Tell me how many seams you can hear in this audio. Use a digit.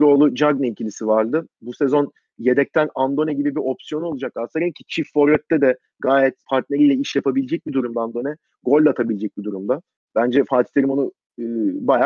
0